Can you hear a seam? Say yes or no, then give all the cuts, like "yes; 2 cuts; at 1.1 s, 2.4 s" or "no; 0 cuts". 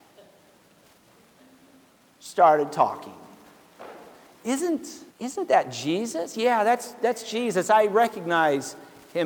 yes; 1 cut; at 5.1 s